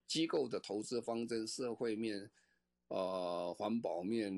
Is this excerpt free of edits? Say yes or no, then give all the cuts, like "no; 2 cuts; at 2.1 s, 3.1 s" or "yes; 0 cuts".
yes; 0 cuts